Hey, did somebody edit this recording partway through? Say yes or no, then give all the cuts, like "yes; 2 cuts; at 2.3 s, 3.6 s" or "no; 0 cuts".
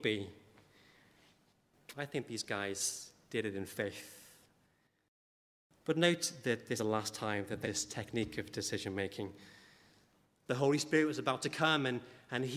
yes; 2 cuts; at 6.8 s, 7.6 s